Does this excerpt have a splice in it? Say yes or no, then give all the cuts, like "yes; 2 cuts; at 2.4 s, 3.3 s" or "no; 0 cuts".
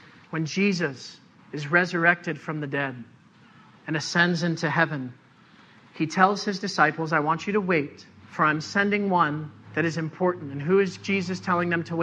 yes; 3 cuts; at 1.4 s, 8.2 s, 9.6 s